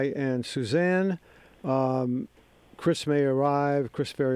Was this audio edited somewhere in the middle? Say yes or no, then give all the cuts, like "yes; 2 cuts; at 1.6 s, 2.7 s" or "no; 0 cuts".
no; 0 cuts